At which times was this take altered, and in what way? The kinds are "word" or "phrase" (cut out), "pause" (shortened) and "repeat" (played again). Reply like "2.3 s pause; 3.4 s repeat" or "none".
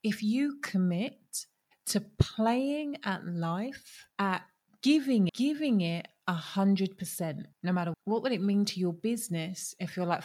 4.1 s pause; 5.3 s word; 7.5 s pause; 7.9 s word